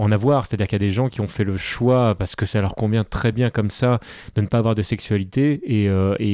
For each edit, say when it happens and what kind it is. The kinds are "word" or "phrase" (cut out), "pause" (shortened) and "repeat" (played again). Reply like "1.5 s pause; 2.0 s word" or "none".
none